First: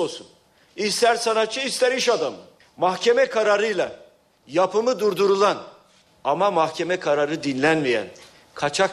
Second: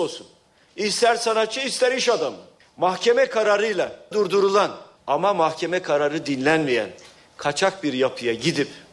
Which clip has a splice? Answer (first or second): second